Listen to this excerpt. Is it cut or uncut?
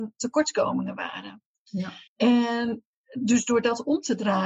cut